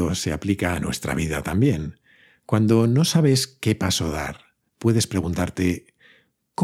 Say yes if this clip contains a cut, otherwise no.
no